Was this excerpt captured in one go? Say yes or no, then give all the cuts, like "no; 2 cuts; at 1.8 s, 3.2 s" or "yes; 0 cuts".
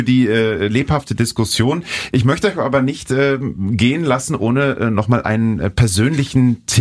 yes; 0 cuts